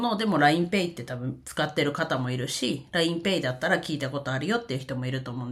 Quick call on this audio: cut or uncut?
uncut